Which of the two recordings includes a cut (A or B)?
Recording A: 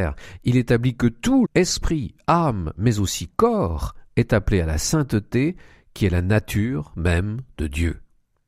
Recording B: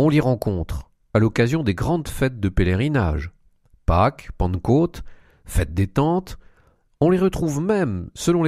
A